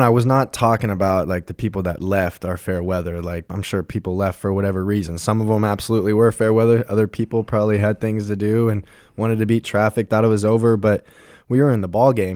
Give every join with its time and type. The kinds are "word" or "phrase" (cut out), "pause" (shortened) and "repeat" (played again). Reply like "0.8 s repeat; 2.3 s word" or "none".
none